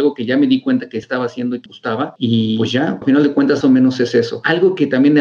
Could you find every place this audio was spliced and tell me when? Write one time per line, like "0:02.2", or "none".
0:01.0
0:01.7
0:03.0
0:03.6